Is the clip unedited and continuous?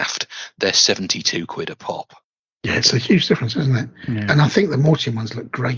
yes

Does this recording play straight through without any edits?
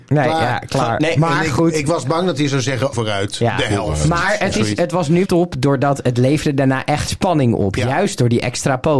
no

